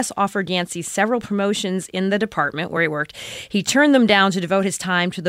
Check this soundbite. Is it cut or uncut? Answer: uncut